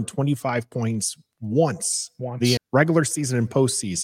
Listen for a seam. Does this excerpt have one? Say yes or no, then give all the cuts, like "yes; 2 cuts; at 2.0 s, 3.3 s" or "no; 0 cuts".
yes; 1 cut; at 2.6 s